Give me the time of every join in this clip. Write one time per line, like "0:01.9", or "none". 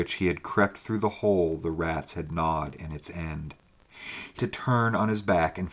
0:04.4